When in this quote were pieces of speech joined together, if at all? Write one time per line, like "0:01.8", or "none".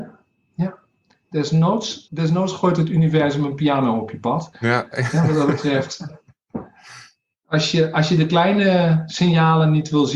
0:02.1